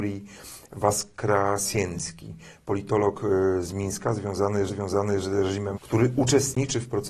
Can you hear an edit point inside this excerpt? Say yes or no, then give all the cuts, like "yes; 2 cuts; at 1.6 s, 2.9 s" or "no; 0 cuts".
yes; 2 cuts; at 4.7 s, 5.8 s